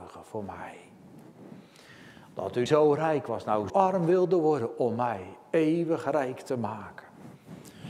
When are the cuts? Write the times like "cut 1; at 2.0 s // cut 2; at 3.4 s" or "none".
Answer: cut 1; at 2.7 s // cut 2; at 3.7 s